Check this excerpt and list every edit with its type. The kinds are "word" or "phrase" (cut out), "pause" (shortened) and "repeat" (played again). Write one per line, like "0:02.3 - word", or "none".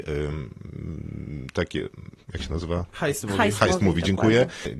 none